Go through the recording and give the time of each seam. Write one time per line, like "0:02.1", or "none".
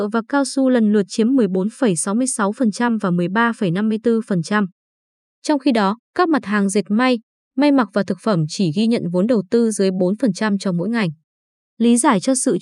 0:06.0

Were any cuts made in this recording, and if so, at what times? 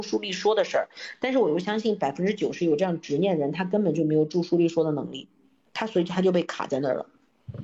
none

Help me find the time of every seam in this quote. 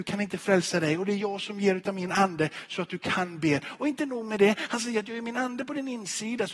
none

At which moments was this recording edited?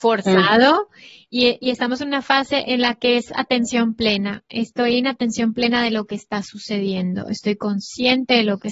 none

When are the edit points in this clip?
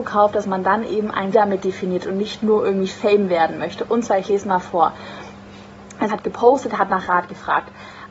0:01.3
0:06.1

